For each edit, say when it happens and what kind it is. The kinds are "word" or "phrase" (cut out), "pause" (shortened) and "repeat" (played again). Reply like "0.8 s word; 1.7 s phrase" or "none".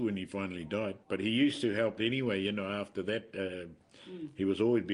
1.0 s pause; 2.0 s word